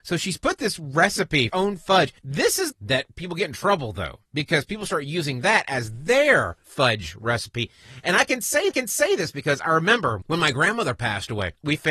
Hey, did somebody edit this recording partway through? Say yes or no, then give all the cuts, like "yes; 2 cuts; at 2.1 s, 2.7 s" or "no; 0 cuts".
yes; 6 cuts; at 1.5 s, 2.2 s, 2.7 s, 4.2 s, 6.6 s, 8.7 s